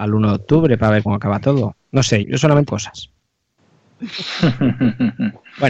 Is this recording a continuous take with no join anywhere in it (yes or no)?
no